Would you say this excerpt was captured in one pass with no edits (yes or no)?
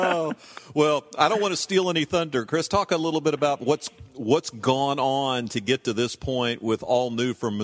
yes